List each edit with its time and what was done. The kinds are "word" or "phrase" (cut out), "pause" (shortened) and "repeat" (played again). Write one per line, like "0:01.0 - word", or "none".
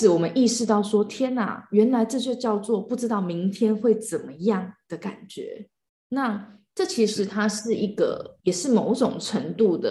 0:05.9 - pause
0:08.4 - pause